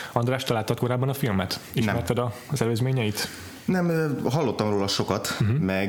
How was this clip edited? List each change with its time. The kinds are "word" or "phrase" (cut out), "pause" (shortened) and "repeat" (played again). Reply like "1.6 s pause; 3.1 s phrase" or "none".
none